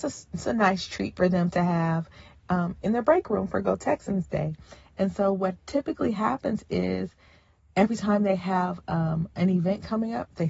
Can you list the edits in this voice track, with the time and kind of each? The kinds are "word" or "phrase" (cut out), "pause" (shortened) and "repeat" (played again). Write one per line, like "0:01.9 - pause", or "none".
none